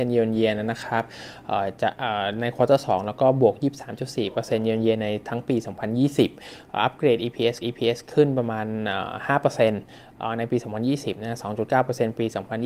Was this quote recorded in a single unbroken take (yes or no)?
no